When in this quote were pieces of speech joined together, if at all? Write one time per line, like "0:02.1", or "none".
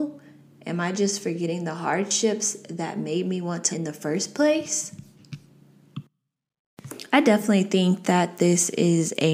0:03.7

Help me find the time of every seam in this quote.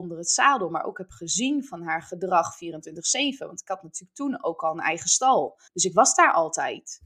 0:05.7

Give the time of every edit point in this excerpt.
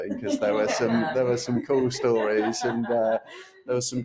none

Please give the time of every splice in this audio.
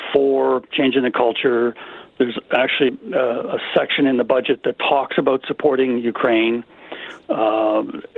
0:02.9

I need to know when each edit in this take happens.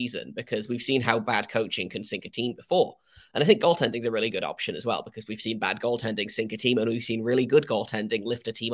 none

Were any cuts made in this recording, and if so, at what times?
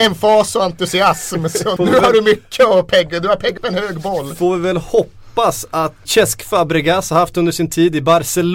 0:01.8
0:03.6
0:06.1

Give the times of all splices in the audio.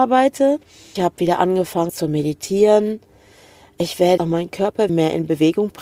0:01.0
0:01.9
0:04.2
0:04.9

